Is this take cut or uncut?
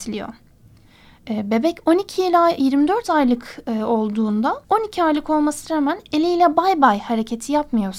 cut